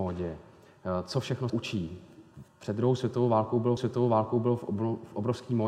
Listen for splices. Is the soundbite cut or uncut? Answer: cut